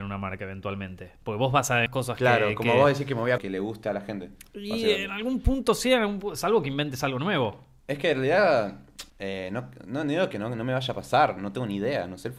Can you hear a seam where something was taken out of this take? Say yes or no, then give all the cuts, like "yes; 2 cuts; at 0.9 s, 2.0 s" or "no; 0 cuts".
yes; 3 cuts; at 1.9 s, 3.4 s, 9.1 s